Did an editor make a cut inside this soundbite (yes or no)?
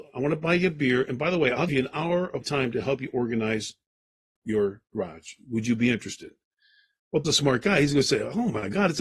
yes